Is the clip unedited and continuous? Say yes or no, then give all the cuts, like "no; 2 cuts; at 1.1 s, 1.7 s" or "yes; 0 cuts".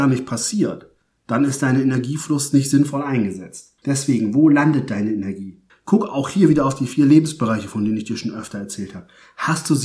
no; 2 cuts; at 3.8 s, 5.7 s